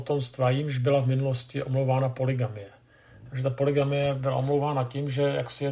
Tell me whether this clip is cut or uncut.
uncut